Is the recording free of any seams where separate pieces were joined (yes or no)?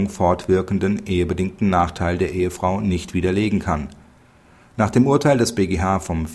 yes